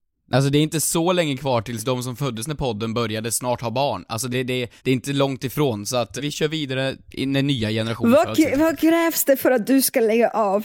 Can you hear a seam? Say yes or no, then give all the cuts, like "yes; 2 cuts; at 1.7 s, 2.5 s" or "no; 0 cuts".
yes; 3 cuts; at 4.3 s, 4.8 s, 6.2 s